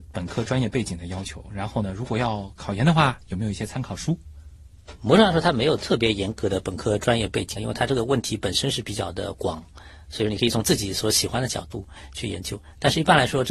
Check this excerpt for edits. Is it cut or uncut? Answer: cut